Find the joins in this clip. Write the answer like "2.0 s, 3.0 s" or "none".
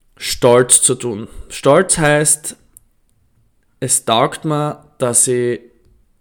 none